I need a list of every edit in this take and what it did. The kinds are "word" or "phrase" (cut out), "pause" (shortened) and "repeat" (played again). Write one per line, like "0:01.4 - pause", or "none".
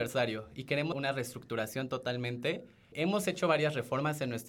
0:00.9 - word